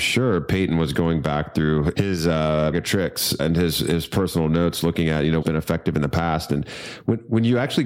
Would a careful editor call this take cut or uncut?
cut